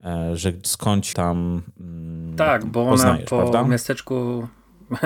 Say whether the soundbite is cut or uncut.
cut